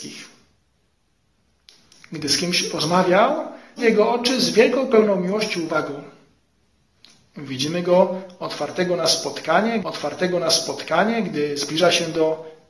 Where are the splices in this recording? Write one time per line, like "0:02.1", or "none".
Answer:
0:03.8
0:09.8